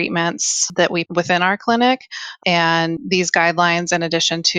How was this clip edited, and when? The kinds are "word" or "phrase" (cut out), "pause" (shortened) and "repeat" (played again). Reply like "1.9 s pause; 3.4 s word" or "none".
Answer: 1.1 s word

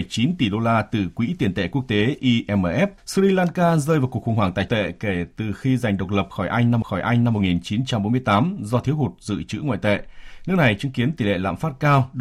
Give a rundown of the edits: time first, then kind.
3.0 s pause; 4.7 s phrase; 6.8 s repeat

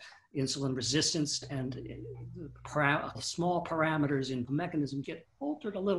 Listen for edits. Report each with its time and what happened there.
1.4 s word; 3.1 s word; 4.5 s word; 5.0 s word

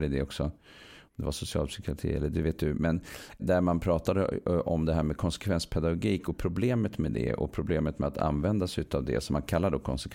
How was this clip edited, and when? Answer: 3.4 s word

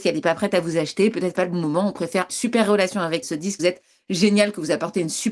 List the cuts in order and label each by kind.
1.4 s phrase; 2.3 s phrase; 3.2 s phrase; 3.6 s word

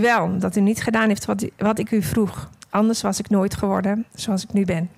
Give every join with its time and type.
none

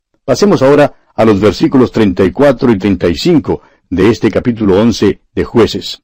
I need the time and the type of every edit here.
none

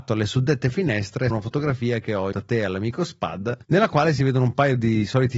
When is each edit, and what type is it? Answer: 1.3 s word; 2.3 s word; 3.6 s pause

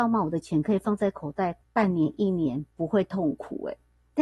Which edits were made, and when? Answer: 1.6 s pause; 2.7 s pause

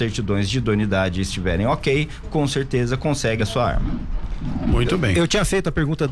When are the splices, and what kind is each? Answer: 2.2 s word; 3.4 s word

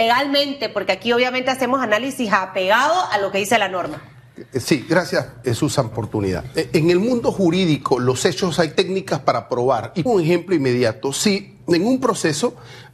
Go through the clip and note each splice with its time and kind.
5.4 s word; 5.9 s phrase; 8.7 s phrase; 10.1 s word

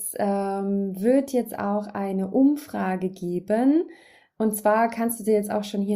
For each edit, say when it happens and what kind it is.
none

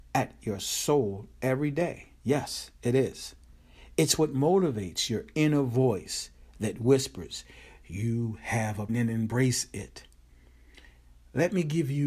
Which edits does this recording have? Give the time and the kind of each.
2.2 s pause; 8.9 s phrase

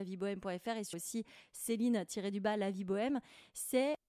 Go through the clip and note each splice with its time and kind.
0.9 s phrase

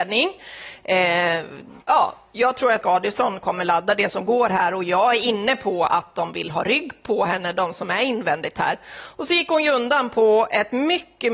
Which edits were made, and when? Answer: 1.8 s pause; 2.8 s word

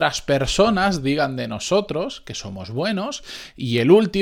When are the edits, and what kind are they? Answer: none

